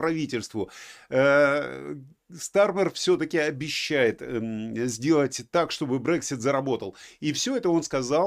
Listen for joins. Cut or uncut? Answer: uncut